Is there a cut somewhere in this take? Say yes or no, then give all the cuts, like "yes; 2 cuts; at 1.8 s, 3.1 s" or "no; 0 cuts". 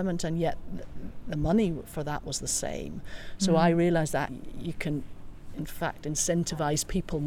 yes; 2 cuts; at 1.2 s, 4.3 s